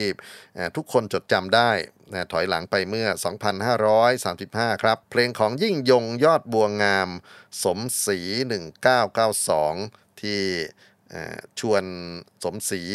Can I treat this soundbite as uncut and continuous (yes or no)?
no